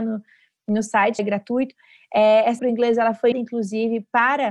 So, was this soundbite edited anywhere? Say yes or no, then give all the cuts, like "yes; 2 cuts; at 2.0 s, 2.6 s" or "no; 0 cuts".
yes; 3 cuts; at 1.2 s, 2.6 s, 3.3 s